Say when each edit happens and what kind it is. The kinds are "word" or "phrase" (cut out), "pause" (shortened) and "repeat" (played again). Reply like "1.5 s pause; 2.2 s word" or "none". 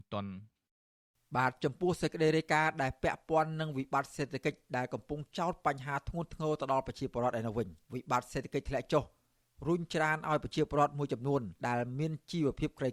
7.8 s pause; 11.6 s pause